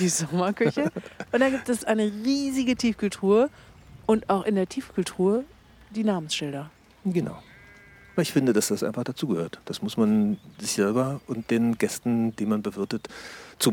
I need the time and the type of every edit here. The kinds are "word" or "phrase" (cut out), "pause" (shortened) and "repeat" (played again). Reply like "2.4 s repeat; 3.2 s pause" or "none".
none